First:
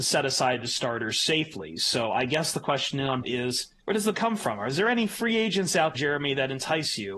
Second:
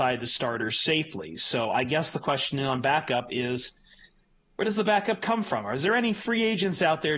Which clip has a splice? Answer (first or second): first